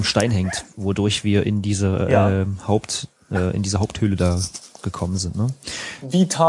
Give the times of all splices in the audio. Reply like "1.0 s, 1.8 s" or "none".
none